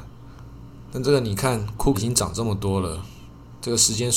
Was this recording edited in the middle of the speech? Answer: yes; 1 cut; at 1.9 s

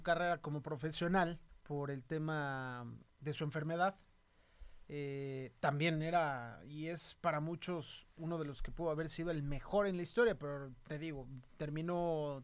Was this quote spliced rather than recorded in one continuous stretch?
yes; 1 cut; at 1.5 s

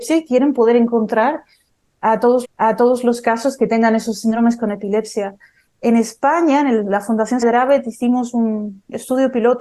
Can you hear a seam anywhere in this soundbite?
yes; 2 cuts; at 2.4 s, 7.4 s

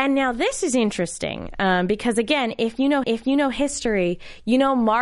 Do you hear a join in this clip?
yes; 1 cut; at 3.0 s

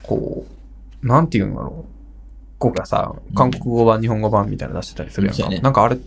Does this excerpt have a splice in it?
yes; 1 cut; at 2.7 s

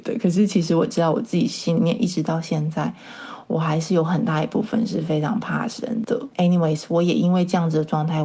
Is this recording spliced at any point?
no; 0 cuts

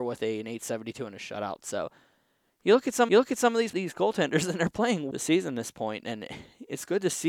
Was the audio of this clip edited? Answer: yes; 3 cuts; at 3.1 s, 3.7 s, 5.1 s

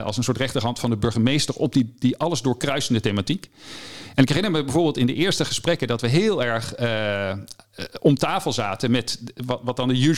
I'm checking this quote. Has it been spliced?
no; 0 cuts

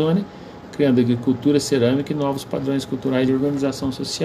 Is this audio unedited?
no; 1 cut; at 3.3 s

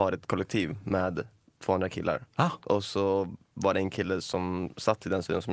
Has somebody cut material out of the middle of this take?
no; 0 cuts

